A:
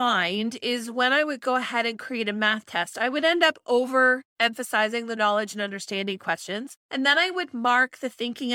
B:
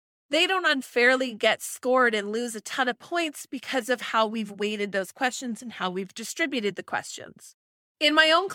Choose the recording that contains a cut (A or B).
A